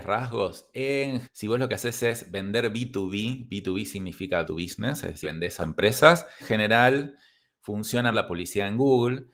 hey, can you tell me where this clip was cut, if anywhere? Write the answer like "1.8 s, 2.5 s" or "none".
1.2 s, 4.4 s, 5.2 s, 5.6 s, 6.4 s, 8.1 s